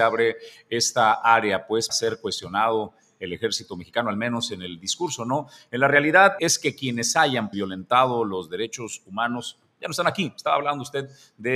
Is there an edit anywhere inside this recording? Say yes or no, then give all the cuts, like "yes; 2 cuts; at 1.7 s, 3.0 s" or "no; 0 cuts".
yes; 3 cuts; at 1.9 s, 6.4 s, 7.5 s